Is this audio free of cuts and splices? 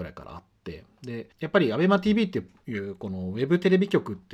no; 1 cut; at 1.3 s

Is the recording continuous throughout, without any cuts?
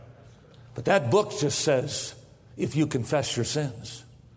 yes; 0 cuts

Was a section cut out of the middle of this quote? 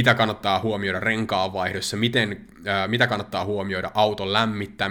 no; 0 cuts

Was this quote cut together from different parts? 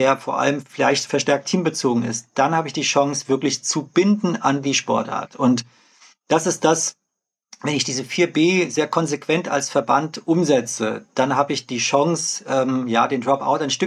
no; 0 cuts

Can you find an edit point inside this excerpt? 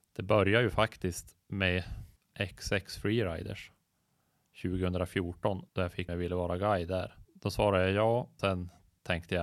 yes; 5 cuts; at 1.4 s, 5.7 s, 6.1 s, 7.2 s, 8.4 s

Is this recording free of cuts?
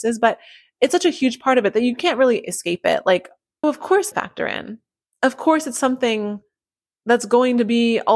no; 3 cuts; at 3.6 s, 4.1 s, 5.0 s

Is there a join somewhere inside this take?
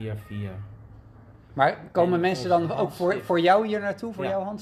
no; 0 cuts

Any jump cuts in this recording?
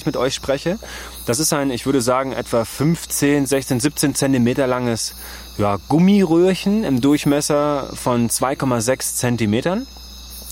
no; 0 cuts

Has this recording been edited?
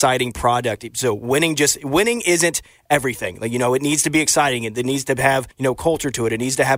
yes; 1 cut; at 5.5 s

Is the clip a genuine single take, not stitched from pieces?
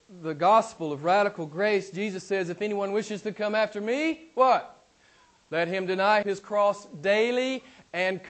no; 1 cut; at 6.2 s

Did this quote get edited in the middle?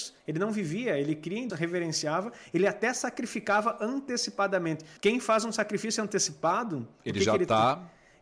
yes; 2 cuts; at 1.5 s, 5.0 s

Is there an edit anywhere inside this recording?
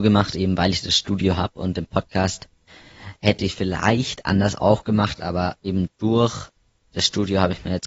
no; 0 cuts

